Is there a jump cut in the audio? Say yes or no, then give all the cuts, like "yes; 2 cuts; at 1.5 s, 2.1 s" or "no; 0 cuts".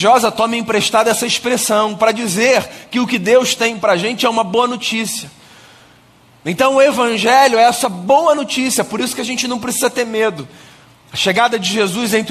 no; 0 cuts